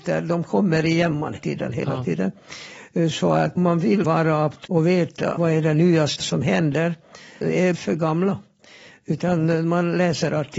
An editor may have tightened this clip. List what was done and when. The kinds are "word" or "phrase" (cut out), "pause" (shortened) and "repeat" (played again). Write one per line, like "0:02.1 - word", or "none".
0:01.4 - word
0:03.6 - word
0:04.0 - word
0:04.6 - word
0:05.4 - word
0:06.2 - word
0:07.4 - word
0:07.7 - word